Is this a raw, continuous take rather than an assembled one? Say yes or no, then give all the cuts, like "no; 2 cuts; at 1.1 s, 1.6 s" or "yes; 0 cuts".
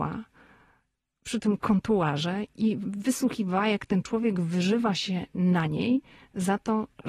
yes; 0 cuts